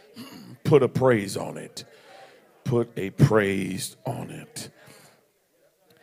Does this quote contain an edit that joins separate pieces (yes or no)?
no